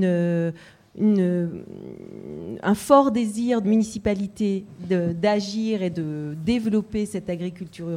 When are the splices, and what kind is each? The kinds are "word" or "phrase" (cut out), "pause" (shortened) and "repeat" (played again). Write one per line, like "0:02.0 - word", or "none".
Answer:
0:03.6 - word